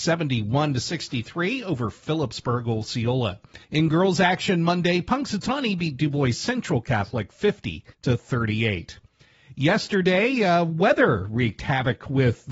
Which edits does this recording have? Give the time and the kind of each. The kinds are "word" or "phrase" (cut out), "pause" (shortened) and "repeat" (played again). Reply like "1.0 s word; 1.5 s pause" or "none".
3.6 s pause; 7.9 s pause